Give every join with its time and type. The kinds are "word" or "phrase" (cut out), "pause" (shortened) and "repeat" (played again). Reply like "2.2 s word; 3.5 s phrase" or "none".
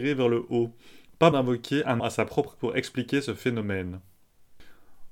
1.3 s word; 2.0 s word; 2.6 s word